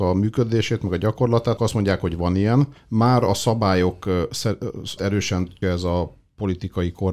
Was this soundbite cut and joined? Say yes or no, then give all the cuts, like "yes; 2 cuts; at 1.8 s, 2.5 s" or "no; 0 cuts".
yes; 4 cuts; at 1.6 s, 2.8 s, 5.0 s, 5.6 s